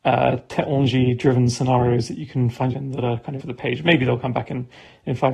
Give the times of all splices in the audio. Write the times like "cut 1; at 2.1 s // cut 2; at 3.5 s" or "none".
cut 1; at 2.7 s // cut 2; at 3.4 s